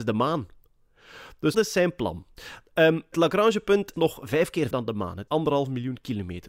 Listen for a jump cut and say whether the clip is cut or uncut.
cut